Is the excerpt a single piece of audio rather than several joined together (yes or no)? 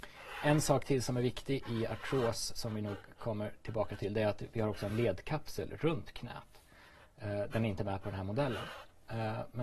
yes